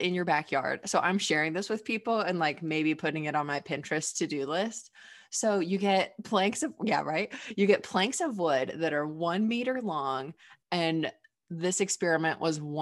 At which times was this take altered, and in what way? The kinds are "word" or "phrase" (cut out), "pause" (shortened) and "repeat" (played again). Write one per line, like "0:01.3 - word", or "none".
none